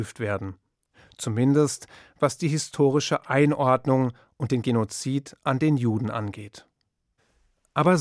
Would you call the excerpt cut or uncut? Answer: uncut